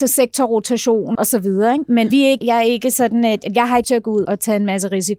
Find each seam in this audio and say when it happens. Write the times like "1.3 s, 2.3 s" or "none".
1.1 s, 2.1 s, 2.4 s, 3.8 s, 4.2 s